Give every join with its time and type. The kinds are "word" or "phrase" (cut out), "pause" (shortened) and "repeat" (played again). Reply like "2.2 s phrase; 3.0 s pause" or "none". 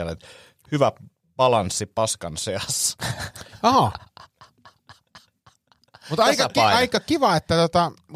none

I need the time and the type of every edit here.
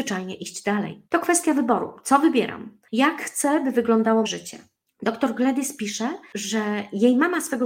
1.1 s pause; 4.2 s word

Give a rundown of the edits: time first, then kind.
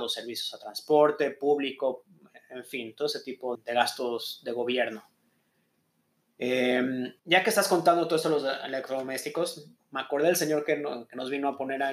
3.5 s word; 7.2 s pause

